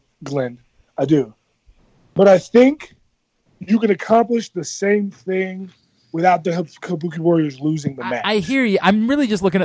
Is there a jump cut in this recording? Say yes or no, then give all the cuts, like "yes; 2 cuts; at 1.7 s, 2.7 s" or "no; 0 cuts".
no; 0 cuts